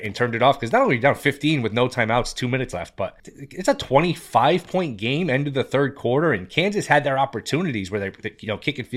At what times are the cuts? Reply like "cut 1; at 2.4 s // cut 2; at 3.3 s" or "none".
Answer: cut 1; at 3.2 s